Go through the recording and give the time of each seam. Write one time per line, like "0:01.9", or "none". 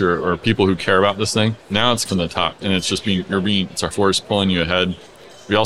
0:01.6
0:02.1
0:03.9